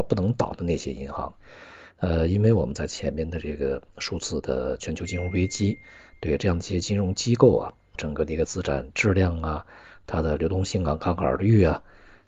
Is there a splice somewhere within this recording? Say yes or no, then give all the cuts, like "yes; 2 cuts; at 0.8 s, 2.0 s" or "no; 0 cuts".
yes; 1 cut; at 7.9 s